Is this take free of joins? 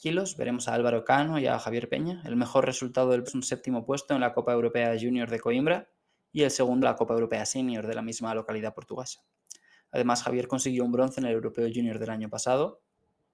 no; 2 cuts; at 3.3 s, 6.8 s

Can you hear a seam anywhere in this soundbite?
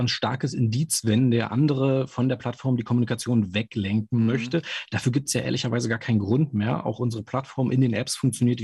no; 0 cuts

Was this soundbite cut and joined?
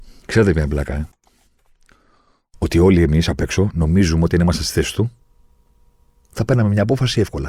no; 0 cuts

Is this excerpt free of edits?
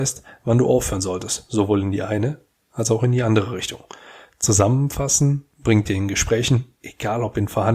yes; 0 cuts

